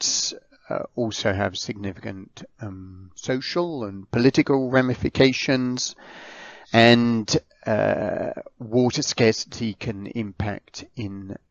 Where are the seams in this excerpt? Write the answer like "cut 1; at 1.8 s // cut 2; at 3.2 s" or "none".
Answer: cut 1; at 6.6 s

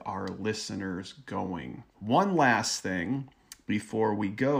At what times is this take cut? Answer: cut 1; at 1.9 s

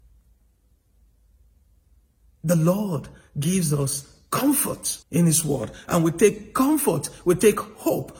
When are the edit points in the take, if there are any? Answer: cut 1; at 5.0 s

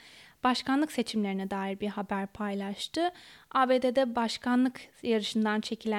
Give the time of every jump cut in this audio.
none

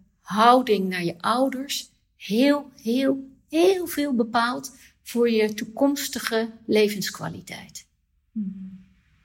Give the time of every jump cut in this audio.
none

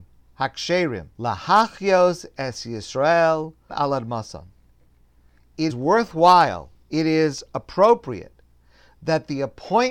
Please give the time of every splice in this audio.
cut 1; at 1.1 s // cut 2; at 3.7 s // cut 3; at 5.7 s

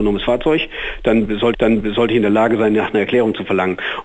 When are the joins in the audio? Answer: cut 1; at 1.5 s

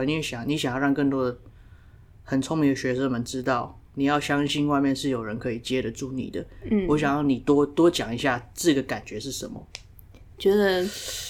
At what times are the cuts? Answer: none

